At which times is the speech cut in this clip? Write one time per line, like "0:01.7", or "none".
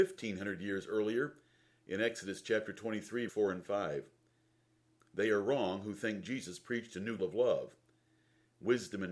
0:03.3
0:07.2